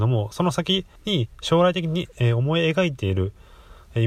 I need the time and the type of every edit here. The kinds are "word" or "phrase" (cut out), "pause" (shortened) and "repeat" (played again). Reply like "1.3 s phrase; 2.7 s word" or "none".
1.0 s pause